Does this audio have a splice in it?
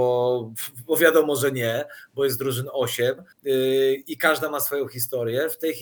yes; 1 cut; at 3.3 s

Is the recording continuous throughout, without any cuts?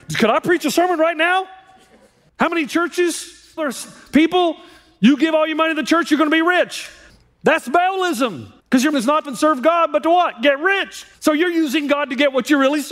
no; 6 cuts; at 3.6 s, 7.1 s, 8.6 s, 8.9 s, 9.3 s, 11.1 s

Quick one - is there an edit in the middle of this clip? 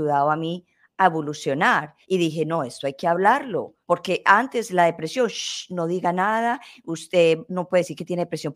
yes; 2 cuts; at 2.0 s, 3.8 s

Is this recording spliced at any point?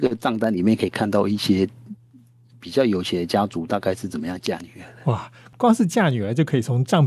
no; 0 cuts

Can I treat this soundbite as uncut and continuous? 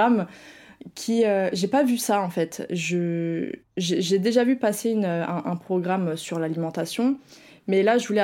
yes; 0 cuts

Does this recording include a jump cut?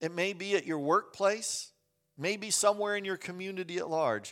no; 0 cuts

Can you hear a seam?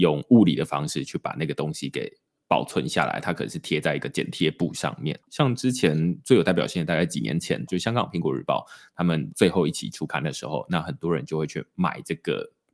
yes; 1 cut; at 5.2 s

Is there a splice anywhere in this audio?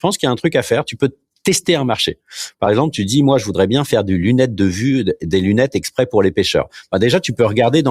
no; 0 cuts

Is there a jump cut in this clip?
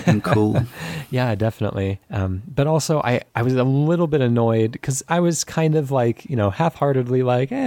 yes; 2 cuts; at 2.0 s, 3.3 s

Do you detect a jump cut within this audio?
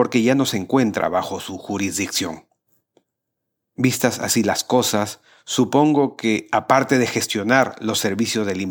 no; 0 cuts

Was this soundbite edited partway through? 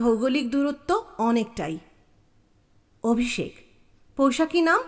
no; 0 cuts

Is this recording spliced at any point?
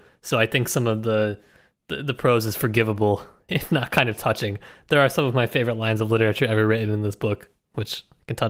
yes; 1 cut; at 3.5 s

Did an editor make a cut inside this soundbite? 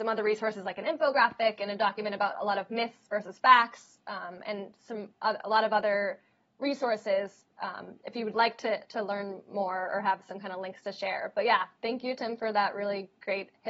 no; 0 cuts

